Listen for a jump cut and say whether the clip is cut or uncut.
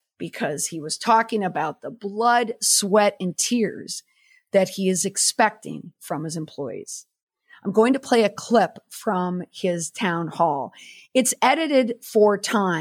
uncut